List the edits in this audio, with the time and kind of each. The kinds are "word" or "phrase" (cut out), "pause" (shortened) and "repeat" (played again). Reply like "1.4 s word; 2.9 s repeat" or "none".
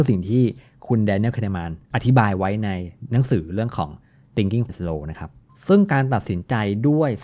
1.8 s pause; 4.7 s word; 5.4 s pause

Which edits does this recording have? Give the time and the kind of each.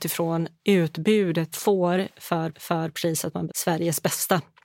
1.5 s phrase; 2.5 s repeat; 3.5 s word

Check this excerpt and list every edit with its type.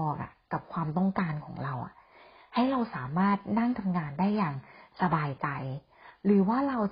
none

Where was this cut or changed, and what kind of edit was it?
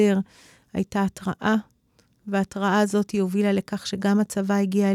none

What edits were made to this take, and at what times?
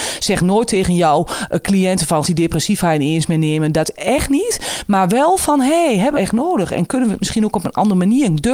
2.2 s word; 6.1 s phrase

